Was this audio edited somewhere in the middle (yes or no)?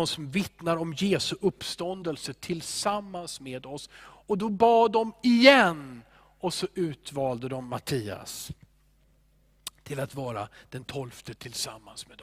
no